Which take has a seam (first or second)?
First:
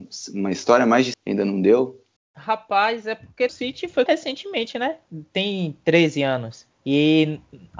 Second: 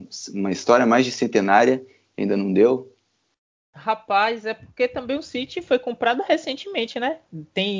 first